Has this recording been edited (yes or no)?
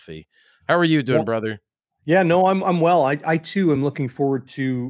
no